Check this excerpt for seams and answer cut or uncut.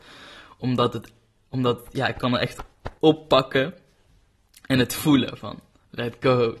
cut